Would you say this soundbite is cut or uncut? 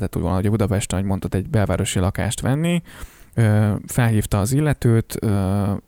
uncut